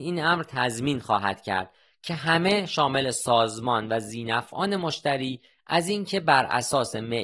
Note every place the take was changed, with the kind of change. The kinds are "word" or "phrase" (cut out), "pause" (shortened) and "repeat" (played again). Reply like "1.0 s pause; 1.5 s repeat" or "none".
none